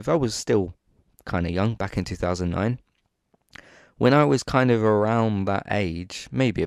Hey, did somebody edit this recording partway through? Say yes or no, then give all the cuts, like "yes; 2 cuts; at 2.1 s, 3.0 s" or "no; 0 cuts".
no; 0 cuts